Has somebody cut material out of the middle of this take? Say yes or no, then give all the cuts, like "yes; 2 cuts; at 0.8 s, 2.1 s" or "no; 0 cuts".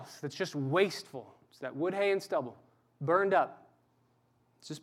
no; 0 cuts